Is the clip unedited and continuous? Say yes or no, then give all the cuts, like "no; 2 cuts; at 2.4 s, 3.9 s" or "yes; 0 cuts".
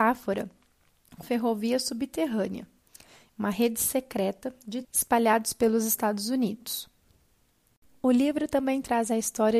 no; 2 cuts; at 1.2 s, 4.8 s